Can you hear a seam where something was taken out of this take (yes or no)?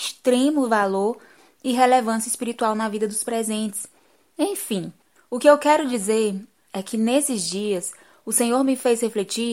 no